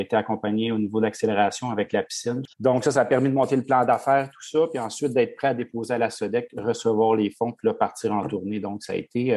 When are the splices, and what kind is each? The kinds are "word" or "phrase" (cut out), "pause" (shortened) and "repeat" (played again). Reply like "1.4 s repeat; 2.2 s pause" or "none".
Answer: 2.5 s pause